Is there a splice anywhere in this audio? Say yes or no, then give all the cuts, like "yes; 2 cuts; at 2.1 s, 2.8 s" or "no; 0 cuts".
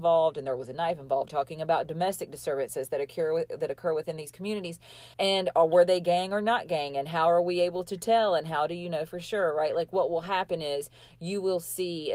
yes; 2 cuts; at 1.3 s, 5.1 s